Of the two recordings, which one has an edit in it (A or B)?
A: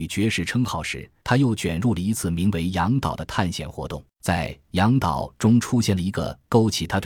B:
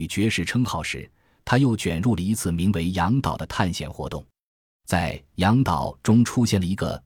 A